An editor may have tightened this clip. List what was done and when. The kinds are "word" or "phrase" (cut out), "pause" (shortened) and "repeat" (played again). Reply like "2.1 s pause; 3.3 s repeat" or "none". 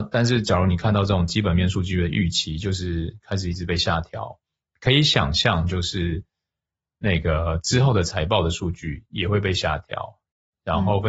none